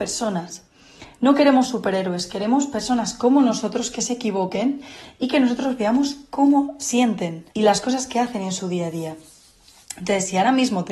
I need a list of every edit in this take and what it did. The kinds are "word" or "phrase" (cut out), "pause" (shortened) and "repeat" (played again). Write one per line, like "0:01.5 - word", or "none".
0:07.5 - pause